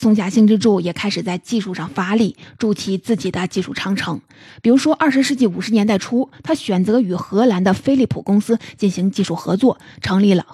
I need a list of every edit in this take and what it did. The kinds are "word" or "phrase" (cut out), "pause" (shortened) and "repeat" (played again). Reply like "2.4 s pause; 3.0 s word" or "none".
none